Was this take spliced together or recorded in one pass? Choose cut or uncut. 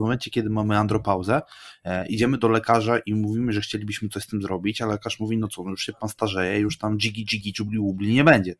uncut